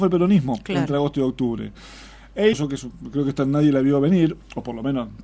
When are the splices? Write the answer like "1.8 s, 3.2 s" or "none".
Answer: 2.5 s

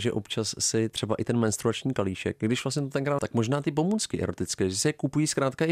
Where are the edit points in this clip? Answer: 3.2 s

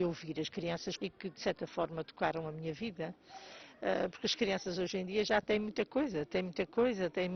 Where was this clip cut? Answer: 1.0 s

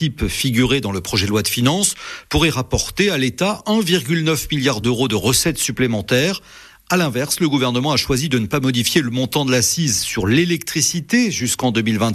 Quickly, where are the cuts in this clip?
none

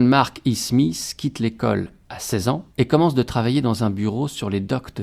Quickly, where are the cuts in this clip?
2.7 s

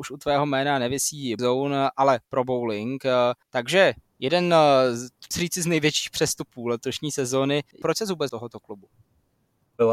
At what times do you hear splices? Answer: 1.4 s, 2.2 s, 3.4 s, 5.3 s, 7.7 s, 8.3 s

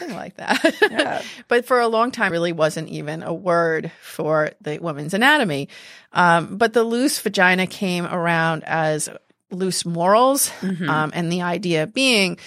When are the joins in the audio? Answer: 2.3 s

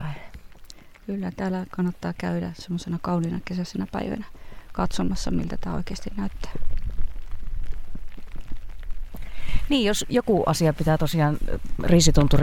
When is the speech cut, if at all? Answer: none

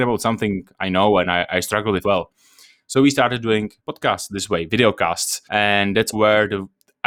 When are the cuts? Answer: 2.0 s, 3.8 s, 5.5 s, 6.1 s

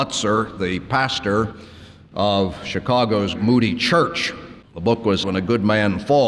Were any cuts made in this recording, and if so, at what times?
3.3 s, 4.6 s, 5.2 s

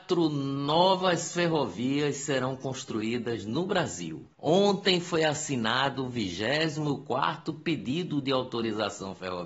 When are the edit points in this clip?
4.3 s

